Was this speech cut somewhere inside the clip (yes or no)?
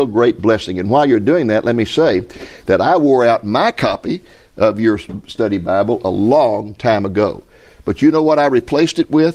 no